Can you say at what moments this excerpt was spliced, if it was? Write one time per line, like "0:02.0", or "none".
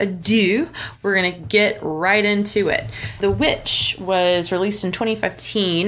none